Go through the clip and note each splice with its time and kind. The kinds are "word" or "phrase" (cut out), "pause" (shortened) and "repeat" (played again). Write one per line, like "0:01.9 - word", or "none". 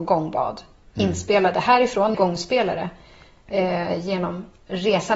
0:02.1 - phrase